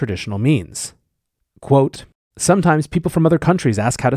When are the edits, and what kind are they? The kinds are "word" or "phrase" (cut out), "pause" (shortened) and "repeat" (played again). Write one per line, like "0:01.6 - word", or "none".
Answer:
none